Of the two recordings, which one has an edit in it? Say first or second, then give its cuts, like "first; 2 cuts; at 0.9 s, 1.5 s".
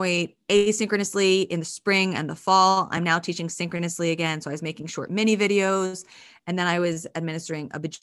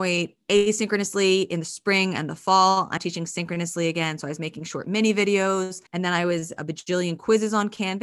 second; 3 cuts; at 3.0 s, 5.9 s, 6.6 s